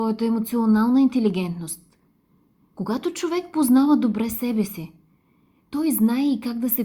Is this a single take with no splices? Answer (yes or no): yes